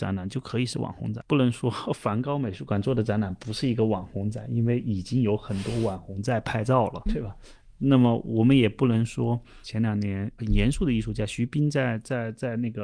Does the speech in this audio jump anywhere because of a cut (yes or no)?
yes